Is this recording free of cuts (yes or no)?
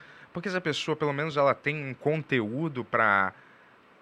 yes